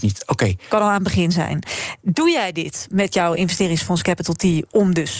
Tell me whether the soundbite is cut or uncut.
uncut